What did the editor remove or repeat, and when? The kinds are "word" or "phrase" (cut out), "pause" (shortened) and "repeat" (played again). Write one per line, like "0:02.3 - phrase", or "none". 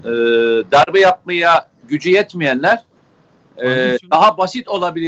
none